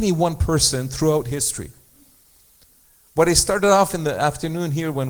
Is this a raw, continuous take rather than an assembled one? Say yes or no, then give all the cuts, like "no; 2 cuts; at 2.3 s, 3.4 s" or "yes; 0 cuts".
yes; 0 cuts